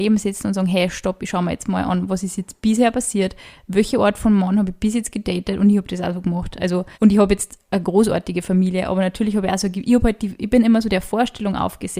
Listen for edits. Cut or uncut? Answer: cut